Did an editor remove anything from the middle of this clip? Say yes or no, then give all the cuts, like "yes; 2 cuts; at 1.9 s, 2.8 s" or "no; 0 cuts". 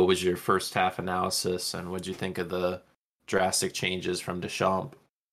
no; 0 cuts